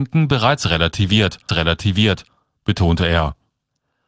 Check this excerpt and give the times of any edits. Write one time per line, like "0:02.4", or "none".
0:01.5